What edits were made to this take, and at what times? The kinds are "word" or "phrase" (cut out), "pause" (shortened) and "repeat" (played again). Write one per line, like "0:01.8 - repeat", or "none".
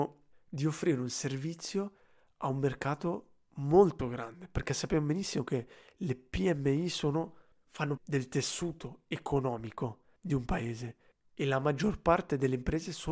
0:08.0 - word
0:10.2 - pause